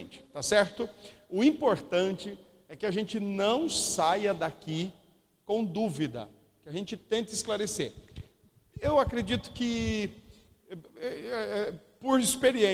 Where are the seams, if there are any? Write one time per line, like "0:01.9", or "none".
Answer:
none